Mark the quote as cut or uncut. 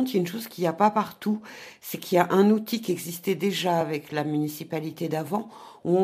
uncut